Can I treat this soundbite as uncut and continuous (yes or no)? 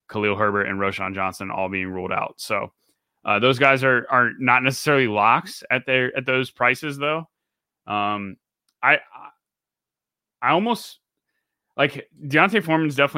yes